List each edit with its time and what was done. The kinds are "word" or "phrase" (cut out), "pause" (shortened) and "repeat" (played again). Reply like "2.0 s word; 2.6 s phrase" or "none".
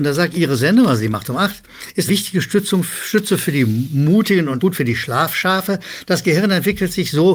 2.1 s word; 4.6 s word

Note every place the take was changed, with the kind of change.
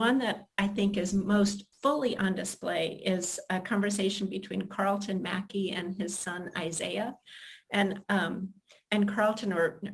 1.7 s pause; 8.0 s word

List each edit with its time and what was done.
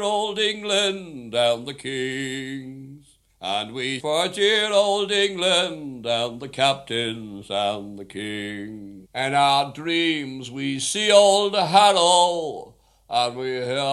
1.7 s phrase; 3.3 s pause; 4.0 s word; 9.0 s pause

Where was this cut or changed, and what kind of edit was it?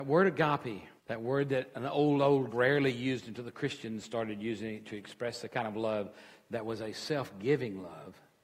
1.0 s pause; 2.5 s phrase

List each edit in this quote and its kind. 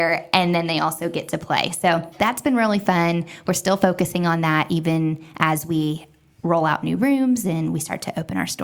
none

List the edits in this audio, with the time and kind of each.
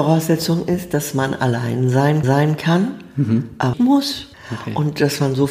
2.2 s repeat; 3.7 s word; 4.3 s pause

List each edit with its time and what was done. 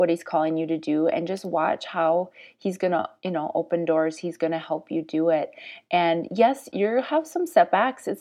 none

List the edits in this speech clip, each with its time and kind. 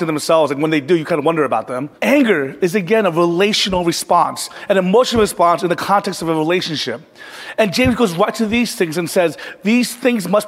2.0 s pause

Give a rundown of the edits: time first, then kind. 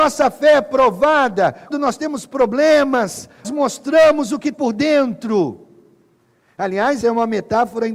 1.7 s word; 3.4 s word; 4.5 s word; 7.0 s word

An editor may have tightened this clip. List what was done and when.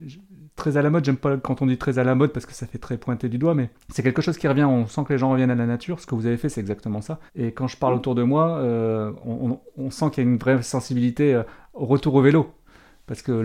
3.8 s pause; 7.3 s pause

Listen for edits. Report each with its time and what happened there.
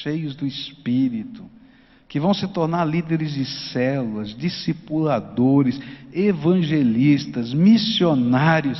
none

